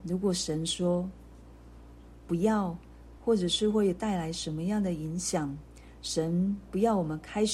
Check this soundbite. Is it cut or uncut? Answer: cut